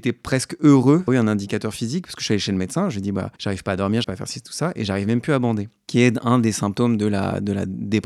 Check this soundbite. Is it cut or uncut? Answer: cut